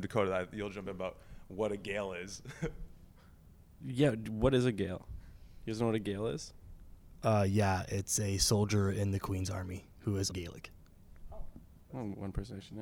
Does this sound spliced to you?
yes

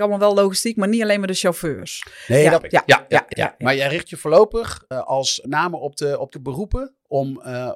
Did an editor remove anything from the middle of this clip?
yes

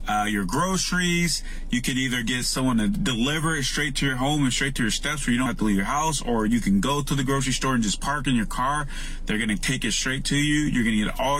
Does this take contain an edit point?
yes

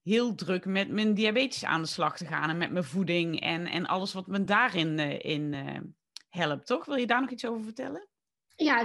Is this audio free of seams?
yes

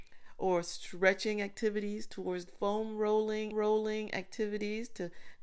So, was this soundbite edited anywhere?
yes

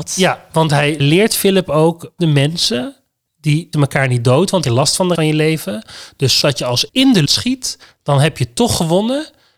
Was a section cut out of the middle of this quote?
yes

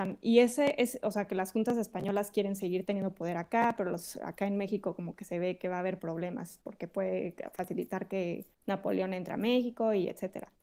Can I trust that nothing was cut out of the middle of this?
no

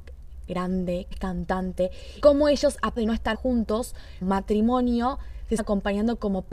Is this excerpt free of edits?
no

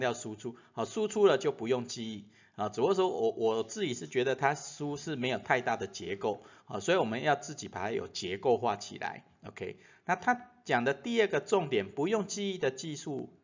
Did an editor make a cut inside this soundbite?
no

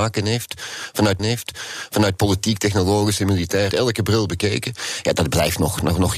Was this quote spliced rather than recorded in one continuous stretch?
yes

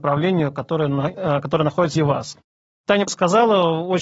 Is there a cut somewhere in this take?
yes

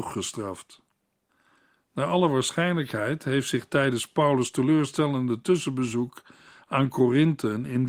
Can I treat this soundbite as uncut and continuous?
yes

